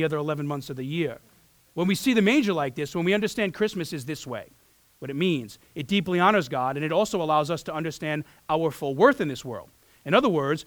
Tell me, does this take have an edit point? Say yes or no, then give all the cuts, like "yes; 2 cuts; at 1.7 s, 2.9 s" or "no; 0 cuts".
no; 0 cuts